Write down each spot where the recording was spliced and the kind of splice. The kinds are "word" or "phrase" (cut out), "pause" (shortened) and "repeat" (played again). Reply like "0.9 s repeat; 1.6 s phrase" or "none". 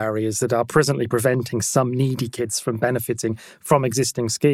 none